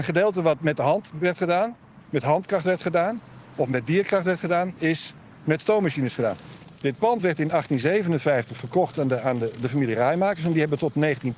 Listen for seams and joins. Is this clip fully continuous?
yes; 0 cuts

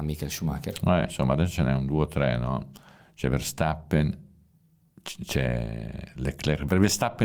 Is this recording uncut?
yes; 0 cuts

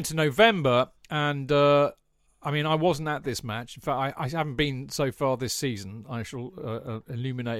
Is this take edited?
no; 0 cuts

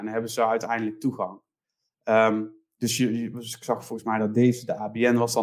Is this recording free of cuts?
yes; 0 cuts

